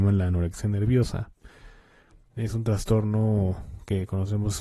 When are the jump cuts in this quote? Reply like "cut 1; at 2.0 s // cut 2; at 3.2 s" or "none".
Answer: none

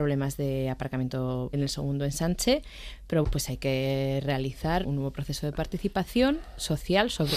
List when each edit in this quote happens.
cut 1; at 1.5 s // cut 2; at 3.2 s // cut 3; at 4.8 s

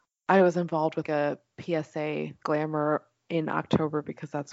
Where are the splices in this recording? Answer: cut 1; at 1.0 s // cut 2; at 2.4 s

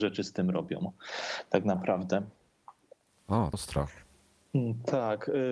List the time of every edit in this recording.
cut 1; at 3.5 s

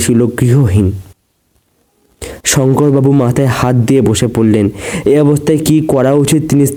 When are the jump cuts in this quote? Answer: none

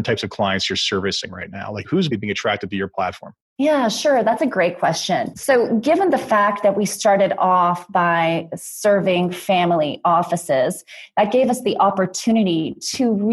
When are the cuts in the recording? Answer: cut 1; at 2.1 s

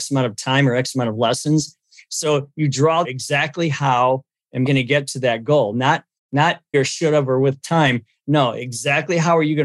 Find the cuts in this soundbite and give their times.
cut 1; at 3.0 s // cut 2; at 4.7 s // cut 3; at 6.7 s

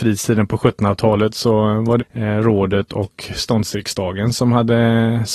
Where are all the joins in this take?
cut 1; at 2.0 s

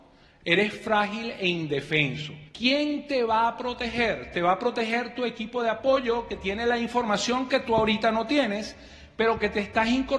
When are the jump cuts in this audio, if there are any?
cut 1; at 2.5 s

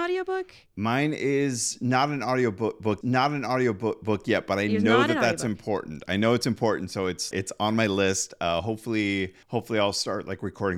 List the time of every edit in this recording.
cut 1; at 3.0 s // cut 2; at 7.3 s // cut 3; at 9.4 s

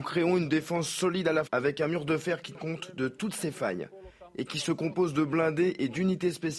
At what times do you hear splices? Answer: cut 1; at 1.5 s // cut 2; at 2.5 s

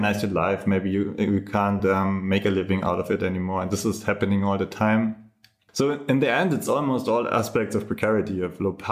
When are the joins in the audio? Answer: none

